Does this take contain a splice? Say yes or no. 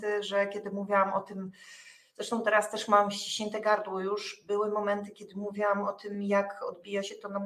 no